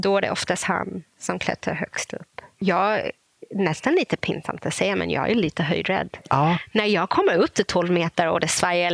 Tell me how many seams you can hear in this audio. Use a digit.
1